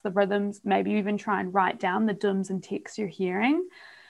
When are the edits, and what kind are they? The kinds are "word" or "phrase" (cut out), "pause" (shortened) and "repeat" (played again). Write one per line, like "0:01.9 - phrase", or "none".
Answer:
none